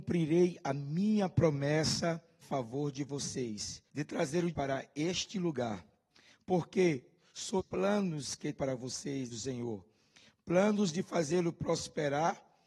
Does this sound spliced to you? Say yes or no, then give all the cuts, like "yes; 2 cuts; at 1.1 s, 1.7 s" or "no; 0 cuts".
yes; 6 cuts; at 2.4 s, 3.9 s, 4.5 s, 7.6 s, 8.5 s, 9.3 s